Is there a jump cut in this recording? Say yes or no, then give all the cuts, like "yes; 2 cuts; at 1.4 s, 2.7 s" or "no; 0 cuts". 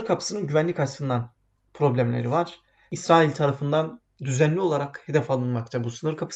no; 0 cuts